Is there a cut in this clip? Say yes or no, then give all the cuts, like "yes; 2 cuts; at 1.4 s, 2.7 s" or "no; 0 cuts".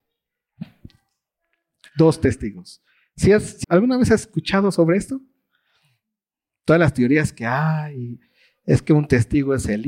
yes; 1 cut; at 3.6 s